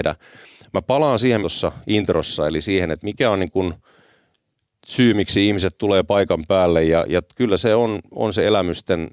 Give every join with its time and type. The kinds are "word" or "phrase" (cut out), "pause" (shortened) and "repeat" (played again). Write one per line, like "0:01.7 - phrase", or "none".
0:01.4 - phrase